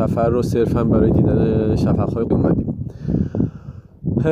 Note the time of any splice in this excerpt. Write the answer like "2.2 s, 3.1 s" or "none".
2.3 s